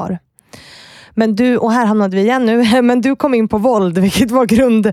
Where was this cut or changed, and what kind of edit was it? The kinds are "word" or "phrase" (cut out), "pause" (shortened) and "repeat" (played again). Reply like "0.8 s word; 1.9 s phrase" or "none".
none